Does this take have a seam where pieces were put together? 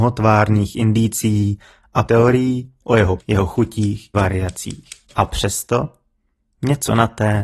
yes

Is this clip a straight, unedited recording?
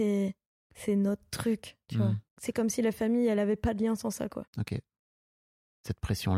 no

